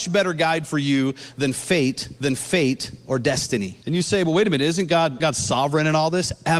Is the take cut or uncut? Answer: cut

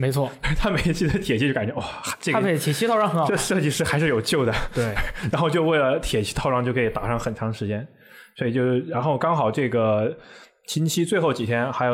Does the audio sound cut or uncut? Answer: uncut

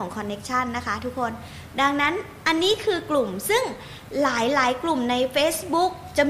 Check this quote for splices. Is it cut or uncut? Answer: uncut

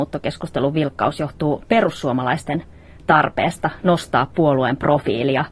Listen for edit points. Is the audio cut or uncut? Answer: uncut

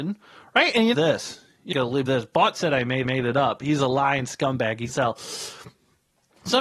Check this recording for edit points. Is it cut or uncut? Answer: cut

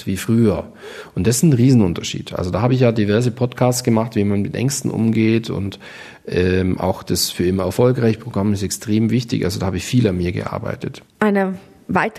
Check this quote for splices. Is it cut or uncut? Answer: uncut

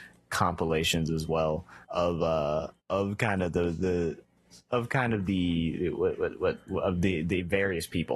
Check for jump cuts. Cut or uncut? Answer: cut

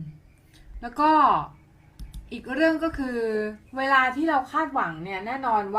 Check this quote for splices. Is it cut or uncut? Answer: cut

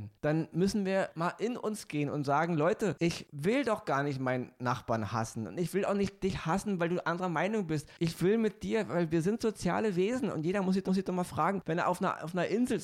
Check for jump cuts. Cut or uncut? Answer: cut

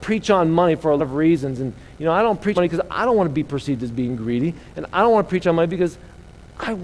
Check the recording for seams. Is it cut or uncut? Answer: cut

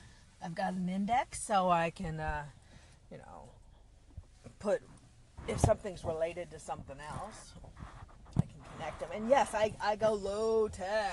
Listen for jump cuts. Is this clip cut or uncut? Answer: uncut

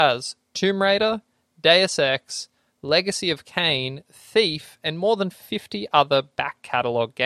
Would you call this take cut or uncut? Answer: uncut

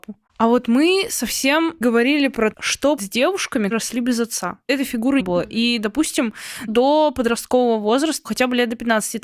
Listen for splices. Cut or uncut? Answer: cut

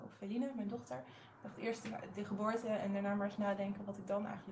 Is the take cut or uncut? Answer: uncut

